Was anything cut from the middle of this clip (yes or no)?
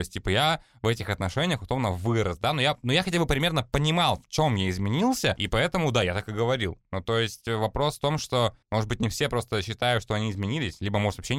yes